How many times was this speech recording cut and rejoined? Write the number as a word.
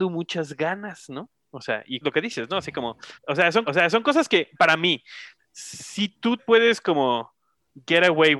six